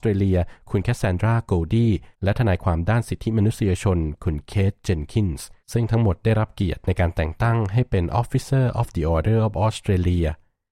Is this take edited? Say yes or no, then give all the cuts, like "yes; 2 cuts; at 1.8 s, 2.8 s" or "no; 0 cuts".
yes; 2 cuts; at 2.1 s, 5.6 s